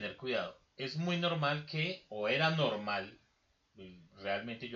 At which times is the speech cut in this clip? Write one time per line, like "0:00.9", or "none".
none